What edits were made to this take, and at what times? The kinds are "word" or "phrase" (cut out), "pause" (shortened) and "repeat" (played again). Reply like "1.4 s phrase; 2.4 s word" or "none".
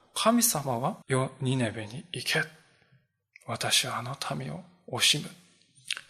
1.0 s pause